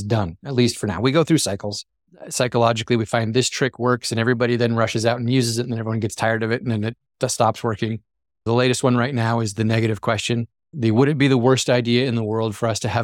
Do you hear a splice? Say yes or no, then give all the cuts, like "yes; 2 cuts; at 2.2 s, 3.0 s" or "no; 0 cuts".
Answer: no; 0 cuts